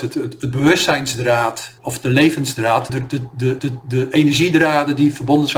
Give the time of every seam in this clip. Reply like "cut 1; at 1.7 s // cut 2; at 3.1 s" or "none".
cut 1; at 1.8 s // cut 2; at 2.9 s // cut 3; at 3.6 s